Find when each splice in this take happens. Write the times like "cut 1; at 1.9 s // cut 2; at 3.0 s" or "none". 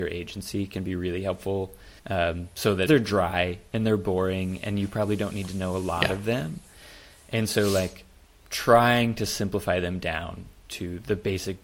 cut 1; at 2.0 s // cut 2; at 2.9 s